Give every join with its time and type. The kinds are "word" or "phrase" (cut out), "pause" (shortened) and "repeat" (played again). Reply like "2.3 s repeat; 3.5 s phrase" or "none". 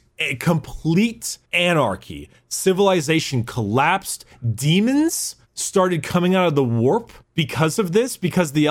1.4 s pause; 5.4 s pause; 7.2 s pause